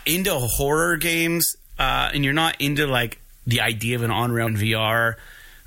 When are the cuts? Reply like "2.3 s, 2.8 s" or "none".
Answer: 4.5 s

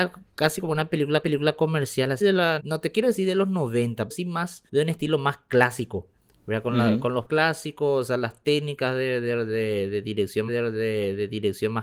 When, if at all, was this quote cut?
1.2 s, 2.2 s, 2.6 s, 4.1 s, 4.7 s, 7.3 s, 10.5 s

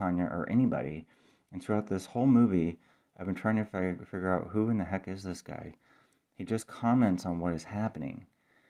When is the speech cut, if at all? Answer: none

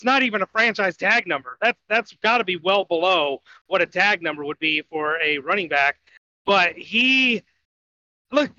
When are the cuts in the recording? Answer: none

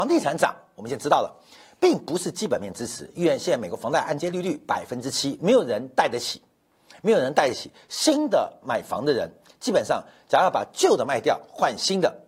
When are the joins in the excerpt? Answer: none

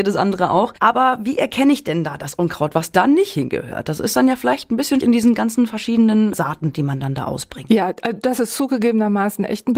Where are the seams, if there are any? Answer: 5.0 s, 6.3 s

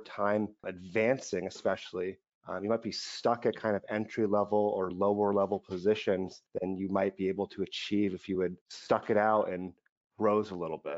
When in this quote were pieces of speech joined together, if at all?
none

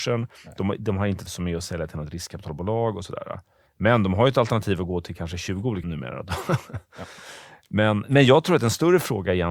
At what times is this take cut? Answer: 1.3 s, 5.8 s

